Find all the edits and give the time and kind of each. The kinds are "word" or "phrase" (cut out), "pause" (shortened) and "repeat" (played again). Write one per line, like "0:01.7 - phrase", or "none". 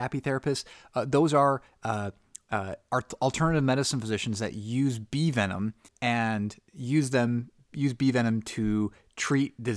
0:05.9 - pause